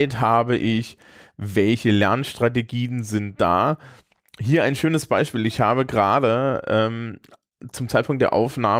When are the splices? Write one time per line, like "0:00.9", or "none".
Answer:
none